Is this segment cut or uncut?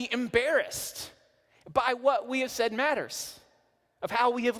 uncut